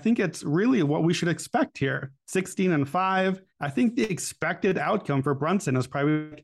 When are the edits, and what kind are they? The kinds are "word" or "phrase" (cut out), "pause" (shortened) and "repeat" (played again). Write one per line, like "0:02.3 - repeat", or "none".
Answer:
0:02.2 - pause
0:03.5 - pause